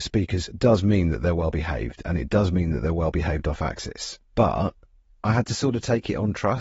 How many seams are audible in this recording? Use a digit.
0